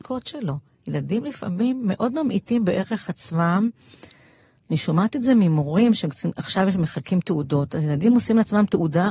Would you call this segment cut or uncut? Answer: uncut